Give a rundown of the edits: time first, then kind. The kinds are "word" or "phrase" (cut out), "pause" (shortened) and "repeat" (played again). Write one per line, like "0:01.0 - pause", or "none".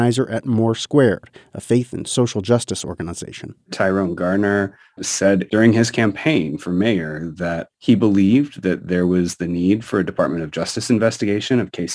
0:07.7 - pause